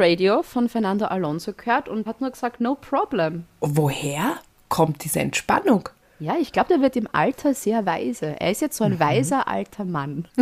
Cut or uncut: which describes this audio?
cut